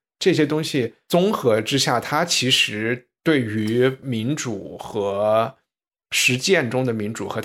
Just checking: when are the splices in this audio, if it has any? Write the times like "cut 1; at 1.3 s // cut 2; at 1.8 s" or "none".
cut 1; at 3.2 s